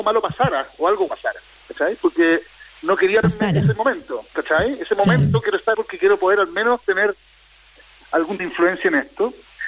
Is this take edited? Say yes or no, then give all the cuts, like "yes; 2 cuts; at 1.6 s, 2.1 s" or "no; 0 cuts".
yes; 4 cuts; at 1.1 s, 3.2 s, 5.7 s, 8.4 s